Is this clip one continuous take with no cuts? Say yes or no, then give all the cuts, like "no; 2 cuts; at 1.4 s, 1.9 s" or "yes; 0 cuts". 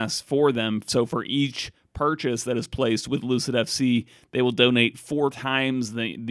yes; 0 cuts